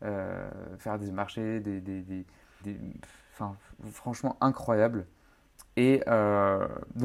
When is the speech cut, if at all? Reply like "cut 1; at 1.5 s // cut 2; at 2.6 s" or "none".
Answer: cut 1; at 1.0 s // cut 2; at 2.6 s

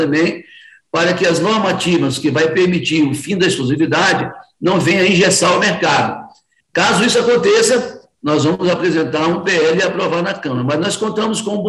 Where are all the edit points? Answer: none

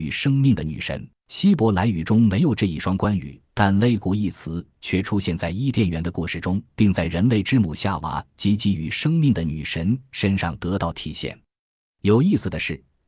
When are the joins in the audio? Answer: cut 1; at 1.2 s // cut 2; at 3.4 s // cut 3; at 6.7 s

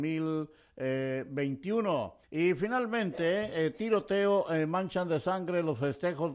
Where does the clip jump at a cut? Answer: cut 1; at 2.2 s

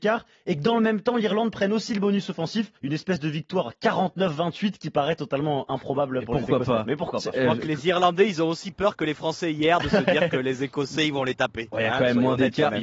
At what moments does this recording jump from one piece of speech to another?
cut 1; at 2.8 s

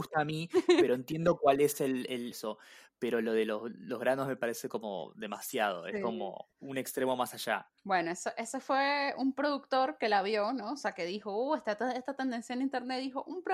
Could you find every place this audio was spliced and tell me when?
cut 1; at 2.3 s // cut 2; at 6.5 s // cut 3; at 7.8 s

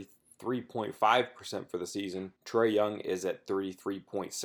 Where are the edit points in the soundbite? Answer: cut 1; at 2.4 s

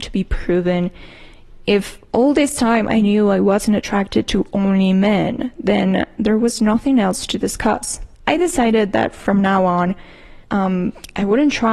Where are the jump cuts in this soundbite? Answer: cut 1; at 2.1 s // cut 2; at 8.1 s // cut 3; at 10.4 s

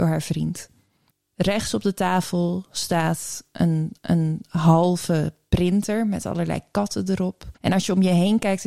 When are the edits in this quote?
cut 1; at 4.0 s // cut 2; at 7.6 s

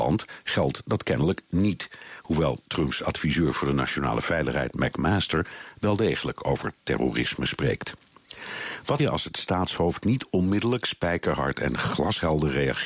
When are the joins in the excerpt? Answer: cut 1; at 9.0 s

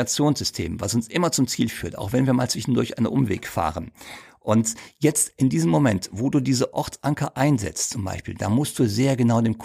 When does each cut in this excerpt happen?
none

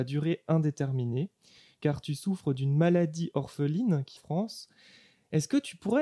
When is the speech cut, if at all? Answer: cut 1; at 4.2 s

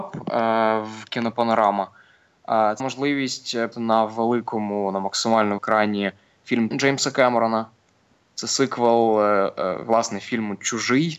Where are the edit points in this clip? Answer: cut 1; at 1.1 s // cut 2; at 2.8 s // cut 3; at 3.7 s // cut 4; at 5.6 s // cut 5; at 6.7 s

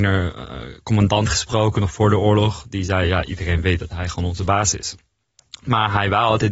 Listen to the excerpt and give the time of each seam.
none

